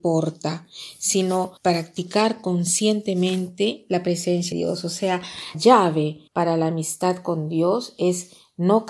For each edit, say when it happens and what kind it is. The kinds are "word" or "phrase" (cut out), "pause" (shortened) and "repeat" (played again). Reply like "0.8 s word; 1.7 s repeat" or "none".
1.6 s pause; 4.5 s word; 5.5 s word; 6.3 s pause